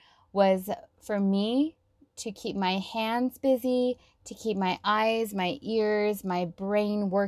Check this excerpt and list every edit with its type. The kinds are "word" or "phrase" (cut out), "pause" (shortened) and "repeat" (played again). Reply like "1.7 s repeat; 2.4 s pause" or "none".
none